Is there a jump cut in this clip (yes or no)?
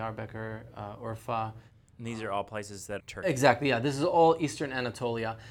yes